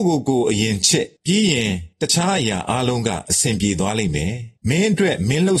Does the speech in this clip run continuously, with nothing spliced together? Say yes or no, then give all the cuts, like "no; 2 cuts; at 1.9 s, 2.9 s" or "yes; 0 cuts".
no; 3 cuts; at 1.2 s, 1.9 s, 4.6 s